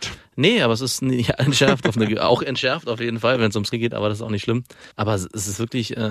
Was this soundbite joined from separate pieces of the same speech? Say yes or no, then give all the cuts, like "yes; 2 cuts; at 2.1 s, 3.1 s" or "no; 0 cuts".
yes; 2 cuts; at 3.7 s, 4.9 s